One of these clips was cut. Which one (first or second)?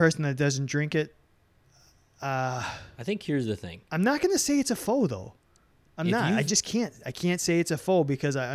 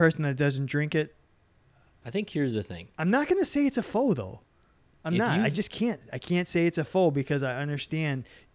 second